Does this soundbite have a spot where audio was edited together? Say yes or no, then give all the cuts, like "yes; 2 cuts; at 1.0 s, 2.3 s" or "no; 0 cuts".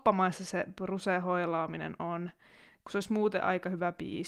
no; 0 cuts